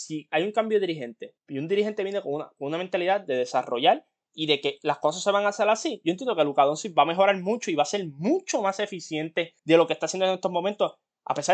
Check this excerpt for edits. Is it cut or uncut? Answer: cut